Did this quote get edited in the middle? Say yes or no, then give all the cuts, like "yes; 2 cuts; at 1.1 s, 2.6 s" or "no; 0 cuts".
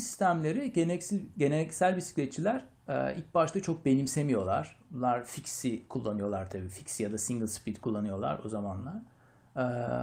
no; 0 cuts